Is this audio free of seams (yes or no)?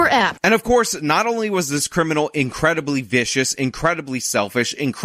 yes